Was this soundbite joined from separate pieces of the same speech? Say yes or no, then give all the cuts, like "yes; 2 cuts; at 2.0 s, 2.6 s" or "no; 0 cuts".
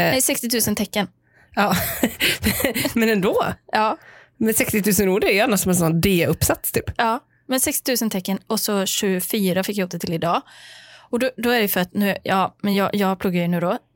no; 0 cuts